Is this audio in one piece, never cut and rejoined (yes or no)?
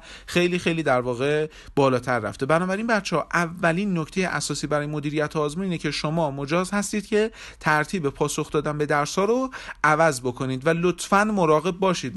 yes